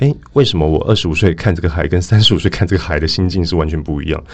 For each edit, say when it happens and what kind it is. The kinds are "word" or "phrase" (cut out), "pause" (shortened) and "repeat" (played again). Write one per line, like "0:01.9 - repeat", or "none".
none